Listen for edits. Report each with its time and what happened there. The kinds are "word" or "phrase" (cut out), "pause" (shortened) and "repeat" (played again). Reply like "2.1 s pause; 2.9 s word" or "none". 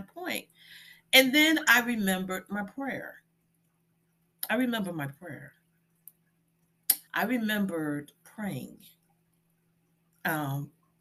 7.1 s pause